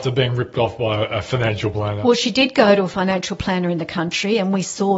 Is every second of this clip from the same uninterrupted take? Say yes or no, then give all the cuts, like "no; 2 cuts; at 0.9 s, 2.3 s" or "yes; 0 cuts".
yes; 0 cuts